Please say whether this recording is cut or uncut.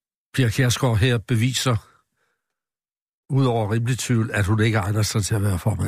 uncut